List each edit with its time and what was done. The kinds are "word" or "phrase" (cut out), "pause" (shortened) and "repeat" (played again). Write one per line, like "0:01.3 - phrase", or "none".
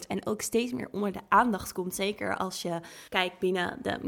0:03.1 - pause